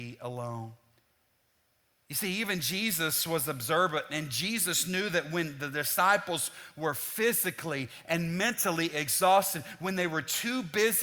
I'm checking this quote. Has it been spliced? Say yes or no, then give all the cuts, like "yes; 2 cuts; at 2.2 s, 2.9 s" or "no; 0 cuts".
no; 0 cuts